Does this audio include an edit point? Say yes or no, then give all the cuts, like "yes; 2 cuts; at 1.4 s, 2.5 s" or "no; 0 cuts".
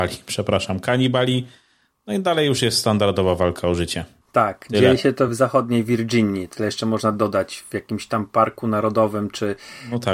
no; 0 cuts